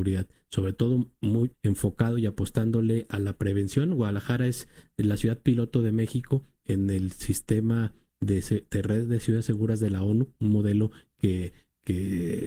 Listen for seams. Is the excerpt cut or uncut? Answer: cut